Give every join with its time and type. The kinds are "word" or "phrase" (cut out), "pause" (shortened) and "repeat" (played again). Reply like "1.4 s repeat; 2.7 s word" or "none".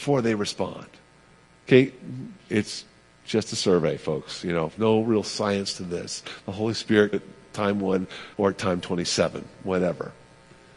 2.4 s pause; 4.8 s word; 7.1 s phrase; 8.3 s pause